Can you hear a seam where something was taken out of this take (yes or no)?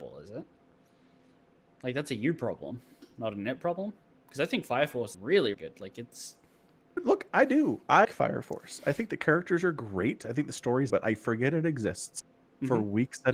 yes